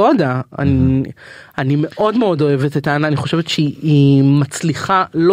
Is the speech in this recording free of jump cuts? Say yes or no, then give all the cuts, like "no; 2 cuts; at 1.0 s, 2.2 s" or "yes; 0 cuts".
yes; 0 cuts